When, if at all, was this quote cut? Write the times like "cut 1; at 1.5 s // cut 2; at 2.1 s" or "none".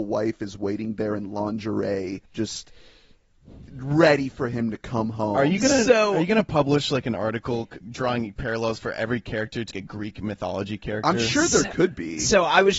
cut 1; at 2.3 s // cut 2; at 7.8 s // cut 3; at 9.7 s